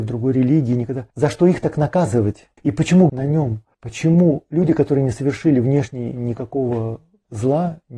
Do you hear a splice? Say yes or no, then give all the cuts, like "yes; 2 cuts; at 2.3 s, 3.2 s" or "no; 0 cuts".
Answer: yes; 4 cuts; at 1.1 s, 2.6 s, 3.1 s, 3.7 s